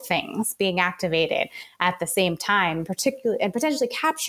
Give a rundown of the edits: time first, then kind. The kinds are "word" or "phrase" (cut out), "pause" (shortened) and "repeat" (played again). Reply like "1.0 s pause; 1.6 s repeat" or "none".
none